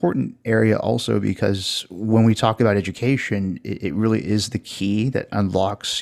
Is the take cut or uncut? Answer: uncut